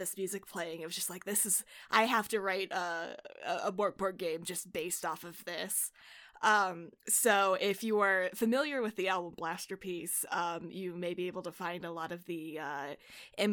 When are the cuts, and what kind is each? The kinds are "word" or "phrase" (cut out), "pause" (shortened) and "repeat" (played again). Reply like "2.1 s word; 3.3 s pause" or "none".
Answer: 7.0 s pause